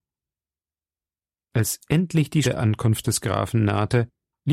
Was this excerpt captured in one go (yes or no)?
no